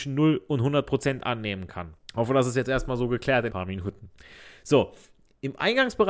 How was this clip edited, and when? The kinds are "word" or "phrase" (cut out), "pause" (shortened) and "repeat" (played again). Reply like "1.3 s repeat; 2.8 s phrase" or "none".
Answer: 2.0 s pause; 3.5 s phrase